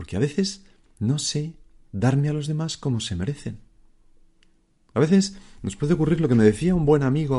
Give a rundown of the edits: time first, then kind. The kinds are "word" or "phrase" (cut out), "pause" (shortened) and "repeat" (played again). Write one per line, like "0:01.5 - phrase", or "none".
none